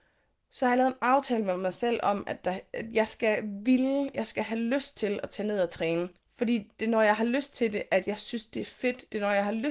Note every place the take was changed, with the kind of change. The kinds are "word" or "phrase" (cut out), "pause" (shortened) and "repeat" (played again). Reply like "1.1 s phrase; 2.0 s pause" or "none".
6.2 s pause